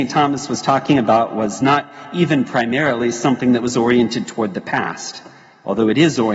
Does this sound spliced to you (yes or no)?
no